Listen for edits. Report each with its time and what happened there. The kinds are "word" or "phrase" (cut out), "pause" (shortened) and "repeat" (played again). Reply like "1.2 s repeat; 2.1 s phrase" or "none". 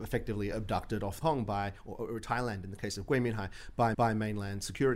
1.2 s phrase; 3.9 s repeat